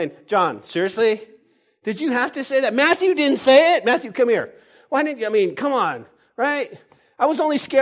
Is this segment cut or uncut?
uncut